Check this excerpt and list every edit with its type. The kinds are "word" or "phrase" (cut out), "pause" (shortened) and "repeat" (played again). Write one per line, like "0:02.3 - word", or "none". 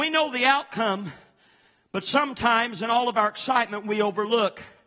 none